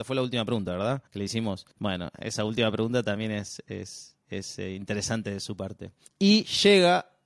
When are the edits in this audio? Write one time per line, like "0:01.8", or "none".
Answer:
0:01.1
0:01.7
0:04.2
0:06.1